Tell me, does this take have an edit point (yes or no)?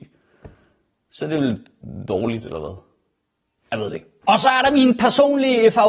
no